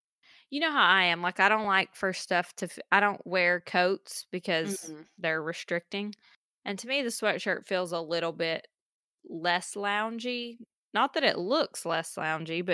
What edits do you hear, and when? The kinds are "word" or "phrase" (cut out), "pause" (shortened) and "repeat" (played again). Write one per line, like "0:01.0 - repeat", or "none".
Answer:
none